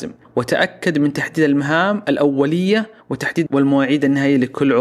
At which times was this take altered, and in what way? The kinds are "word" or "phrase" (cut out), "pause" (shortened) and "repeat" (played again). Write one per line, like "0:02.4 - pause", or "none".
0:03.5 - word

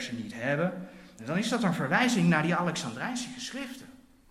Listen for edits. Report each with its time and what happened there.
0:01.2 - word

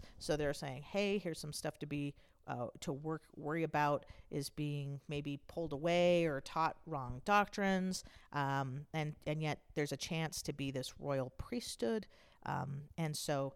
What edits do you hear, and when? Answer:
none

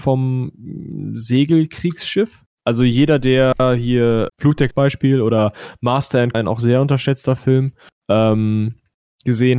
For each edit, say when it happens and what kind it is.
0:04.3 - word
0:04.7 - phrase
0:06.3 - word

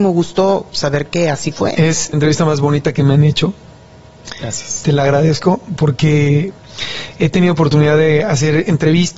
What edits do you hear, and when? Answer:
0:02.1 - word

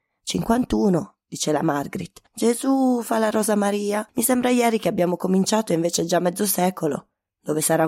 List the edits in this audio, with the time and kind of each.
none

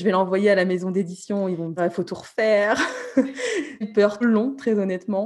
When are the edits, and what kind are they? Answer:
0:01.8 - word
0:03.8 - word
0:04.2 - word

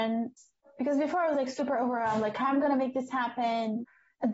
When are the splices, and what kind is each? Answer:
none

